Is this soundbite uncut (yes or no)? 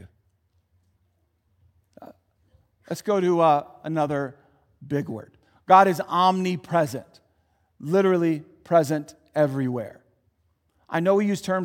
yes